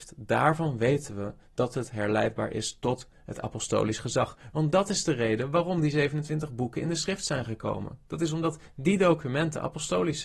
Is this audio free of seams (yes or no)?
yes